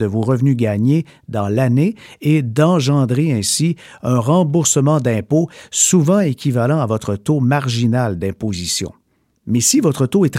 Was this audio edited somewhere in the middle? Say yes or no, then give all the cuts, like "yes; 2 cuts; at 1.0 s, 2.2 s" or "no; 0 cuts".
no; 0 cuts